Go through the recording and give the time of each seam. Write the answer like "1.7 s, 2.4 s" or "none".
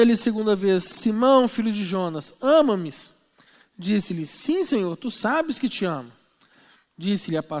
none